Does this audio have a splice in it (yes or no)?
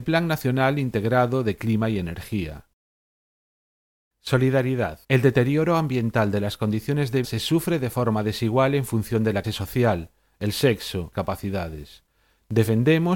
yes